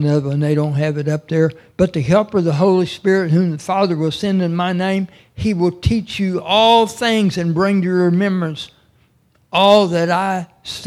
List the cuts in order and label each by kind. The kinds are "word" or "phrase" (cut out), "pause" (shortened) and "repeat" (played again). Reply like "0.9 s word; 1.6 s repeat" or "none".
none